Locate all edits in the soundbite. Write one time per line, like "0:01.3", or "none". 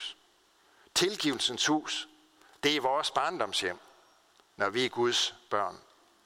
none

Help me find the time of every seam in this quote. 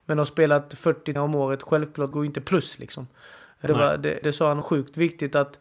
0:01.2
0:02.1
0:03.7
0:04.2
0:04.6

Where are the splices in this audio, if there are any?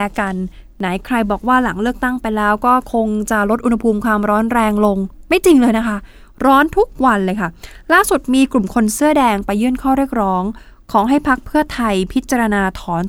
none

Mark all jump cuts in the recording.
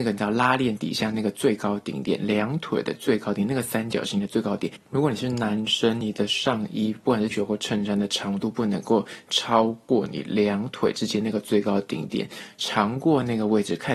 0:07.3

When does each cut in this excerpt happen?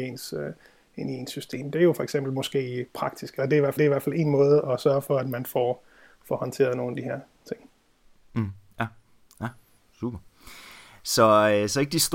0:03.8

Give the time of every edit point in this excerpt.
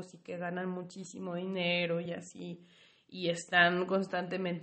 none

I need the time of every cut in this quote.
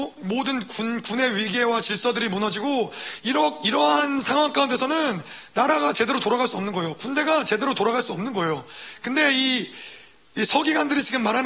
none

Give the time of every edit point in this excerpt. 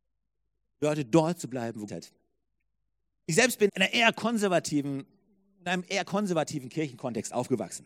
0:01.9
0:03.7

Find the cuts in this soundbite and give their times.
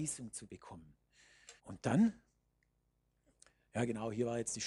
0:01.6

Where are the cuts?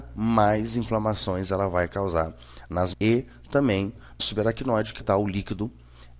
0:02.9
0:04.2
0:05.0

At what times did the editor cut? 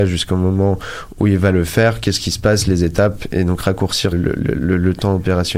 0:04.1

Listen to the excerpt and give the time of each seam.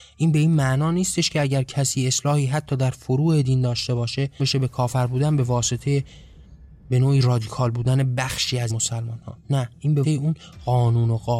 0:04.4
0:08.7
0:10.0

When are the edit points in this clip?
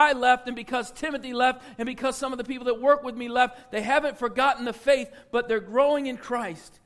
none

